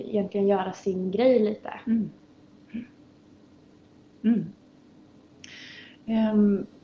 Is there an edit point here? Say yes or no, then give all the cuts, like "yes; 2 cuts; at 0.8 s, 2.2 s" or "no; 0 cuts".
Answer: no; 0 cuts